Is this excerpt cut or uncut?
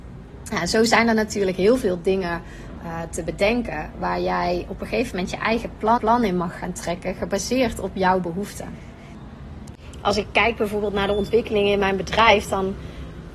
cut